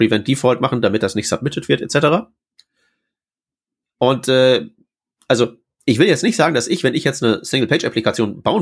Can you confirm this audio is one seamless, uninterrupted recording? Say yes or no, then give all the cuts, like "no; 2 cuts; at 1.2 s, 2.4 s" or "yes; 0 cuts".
yes; 0 cuts